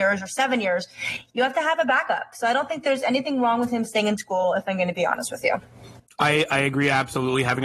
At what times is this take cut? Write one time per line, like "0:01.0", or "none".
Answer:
none